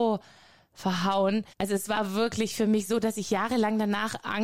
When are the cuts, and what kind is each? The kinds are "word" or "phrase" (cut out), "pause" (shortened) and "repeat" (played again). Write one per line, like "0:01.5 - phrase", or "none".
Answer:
0:01.5 - pause